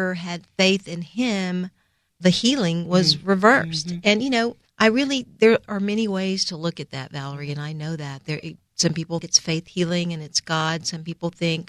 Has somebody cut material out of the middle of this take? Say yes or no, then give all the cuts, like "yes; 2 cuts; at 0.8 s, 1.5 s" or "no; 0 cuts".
yes; 3 cuts; at 2.1 s, 4.6 s, 9.2 s